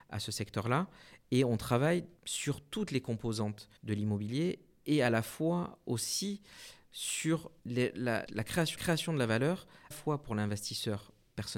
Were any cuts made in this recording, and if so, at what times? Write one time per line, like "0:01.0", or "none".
0:02.2
0:03.8
0:07.6
0:08.3
0:08.8
0:09.9